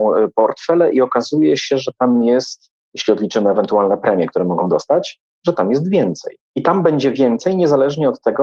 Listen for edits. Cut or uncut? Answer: cut